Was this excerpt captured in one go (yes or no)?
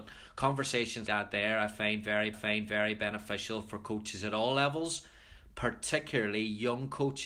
no